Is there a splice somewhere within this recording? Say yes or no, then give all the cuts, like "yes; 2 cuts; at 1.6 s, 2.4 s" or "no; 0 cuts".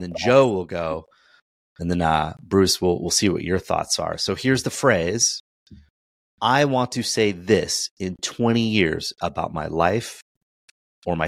no; 0 cuts